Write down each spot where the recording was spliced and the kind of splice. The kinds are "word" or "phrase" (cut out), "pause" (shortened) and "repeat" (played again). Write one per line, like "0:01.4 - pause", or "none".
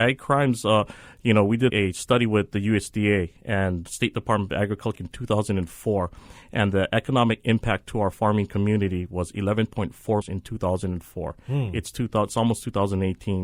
0:01.7 - word
0:03.9 - word
0:05.0 - word
0:10.2 - word